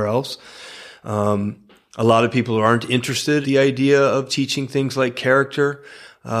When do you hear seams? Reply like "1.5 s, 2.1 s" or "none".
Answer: 3.4 s, 4.3 s